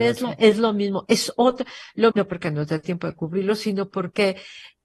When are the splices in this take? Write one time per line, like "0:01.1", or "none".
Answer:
0:02.1